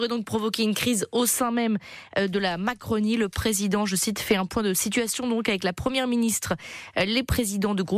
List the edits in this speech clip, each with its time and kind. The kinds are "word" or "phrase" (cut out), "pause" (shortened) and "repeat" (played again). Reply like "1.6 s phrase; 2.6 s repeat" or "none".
none